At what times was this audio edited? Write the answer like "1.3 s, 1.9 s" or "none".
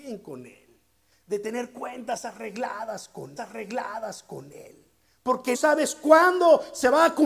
3.4 s, 5.5 s